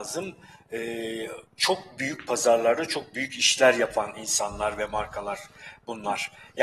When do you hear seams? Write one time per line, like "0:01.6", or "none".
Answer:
0:01.5